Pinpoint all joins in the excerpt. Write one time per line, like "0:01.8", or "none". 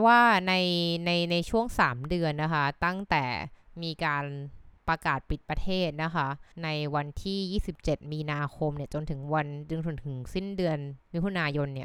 0:04.8
0:06.5